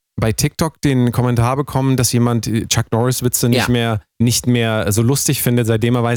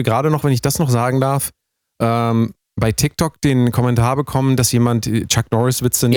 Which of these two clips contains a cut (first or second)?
first